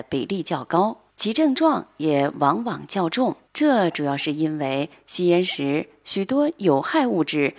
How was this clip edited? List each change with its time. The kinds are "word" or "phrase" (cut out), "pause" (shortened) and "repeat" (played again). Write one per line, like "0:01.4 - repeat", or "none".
0:01.1 - pause
0:03.5 - pause